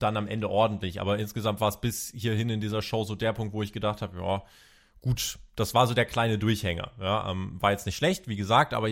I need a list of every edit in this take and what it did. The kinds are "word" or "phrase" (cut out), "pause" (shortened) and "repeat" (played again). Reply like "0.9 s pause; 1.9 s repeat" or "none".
none